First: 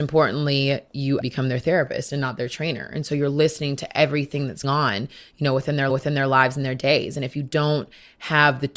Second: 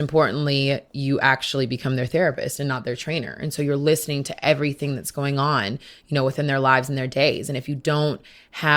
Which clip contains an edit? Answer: first; 3 cuts; at 1.2 s, 4.6 s, 5.9 s

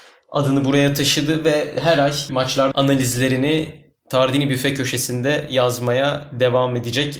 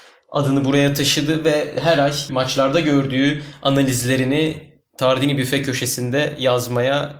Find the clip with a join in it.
first; 1 cut; at 2.7 s

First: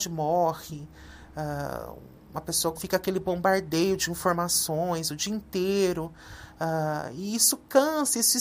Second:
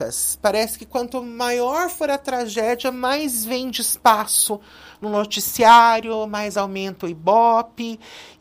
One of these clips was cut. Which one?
first; 1 cut; at 2.7 s

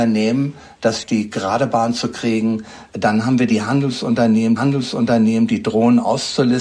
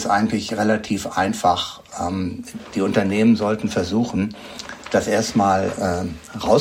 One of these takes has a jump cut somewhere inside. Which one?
first; 2 cuts; at 1.0 s, 4.6 s

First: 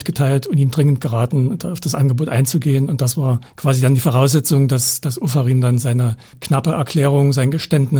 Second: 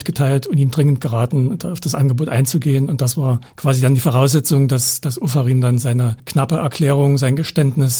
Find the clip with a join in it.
second; 1 cut; at 6.2 s

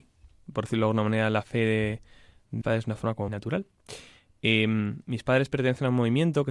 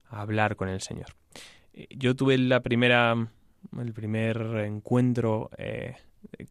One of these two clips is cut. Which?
first; 2 cuts; at 2.6 s, 3.3 s

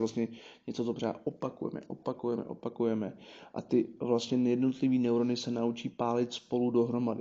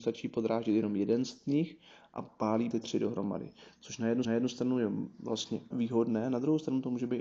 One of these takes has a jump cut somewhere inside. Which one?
second; 3 cuts; at 2.7 s, 4.2 s, 5.7 s

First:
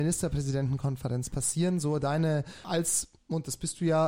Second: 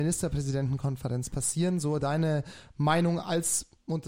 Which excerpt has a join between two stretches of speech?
first; 1 cut; at 2.6 s

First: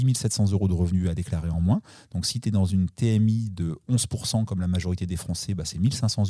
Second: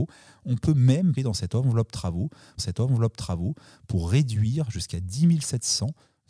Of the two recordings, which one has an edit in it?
second; 2 cuts; at 1.2 s, 2.6 s

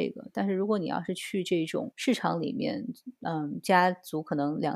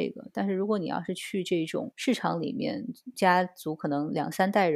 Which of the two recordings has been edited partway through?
second; 1 cut; at 3.1 s

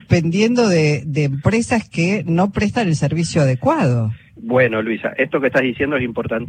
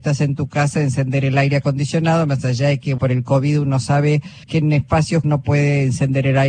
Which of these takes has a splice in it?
second; 3 cuts; at 3.0 s, 4.4 s, 5.2 s

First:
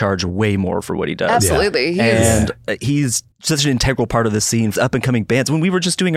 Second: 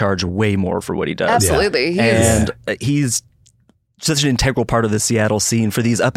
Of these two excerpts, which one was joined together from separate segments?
first; 3 cuts; at 3.3 s, 4.4 s, 4.8 s

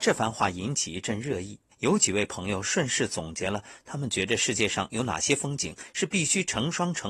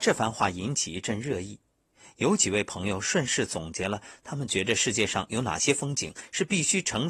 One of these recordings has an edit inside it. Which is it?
first; 1 cut; at 1.7 s

